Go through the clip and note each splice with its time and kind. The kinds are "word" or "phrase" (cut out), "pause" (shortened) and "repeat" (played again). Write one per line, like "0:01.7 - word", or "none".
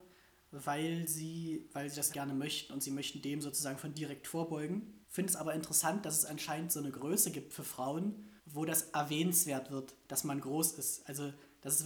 0:02.1 - word
0:05.0 - pause
0:08.4 - pause